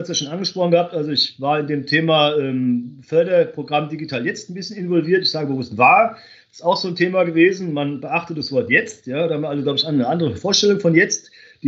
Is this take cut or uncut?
uncut